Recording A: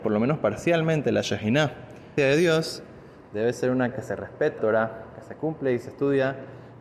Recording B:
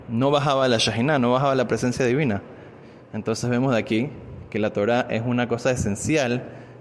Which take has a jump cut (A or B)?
A